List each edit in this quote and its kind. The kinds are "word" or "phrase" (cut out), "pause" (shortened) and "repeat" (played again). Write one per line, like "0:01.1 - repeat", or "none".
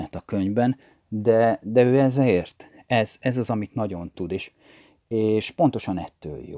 none